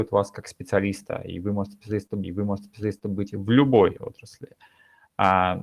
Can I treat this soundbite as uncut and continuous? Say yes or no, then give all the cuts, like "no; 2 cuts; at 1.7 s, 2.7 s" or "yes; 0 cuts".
no; 1 cut; at 2.2 s